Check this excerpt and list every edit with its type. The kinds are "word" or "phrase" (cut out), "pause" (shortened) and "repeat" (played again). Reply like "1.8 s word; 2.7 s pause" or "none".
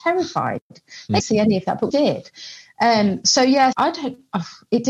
1.2 s word; 1.9 s word; 3.2 s word; 3.7 s word